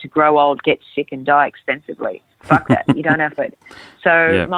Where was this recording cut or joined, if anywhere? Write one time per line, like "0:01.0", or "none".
0:02.3
0:03.4